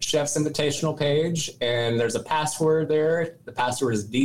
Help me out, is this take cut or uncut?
uncut